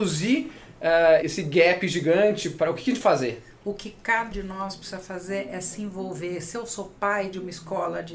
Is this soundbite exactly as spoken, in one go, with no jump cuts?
no; 3 cuts; at 1.2 s, 3.0 s, 4.3 s

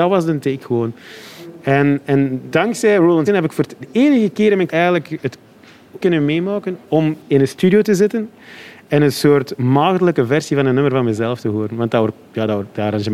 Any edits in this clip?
yes; 6 cuts; at 2.5 s, 3.3 s, 3.8 s, 4.7 s, 6.0 s, 6.8 s

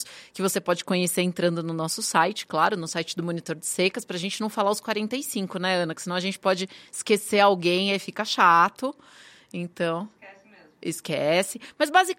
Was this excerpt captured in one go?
yes; 0 cuts

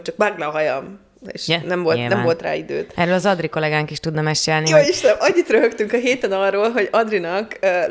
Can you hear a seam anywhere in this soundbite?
no; 0 cuts

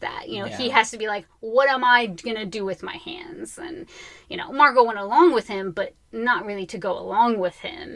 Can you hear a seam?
no; 0 cuts

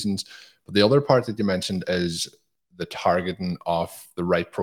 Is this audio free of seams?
yes; 0 cuts

